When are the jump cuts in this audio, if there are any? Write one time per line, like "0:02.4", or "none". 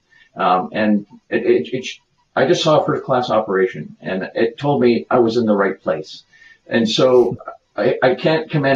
none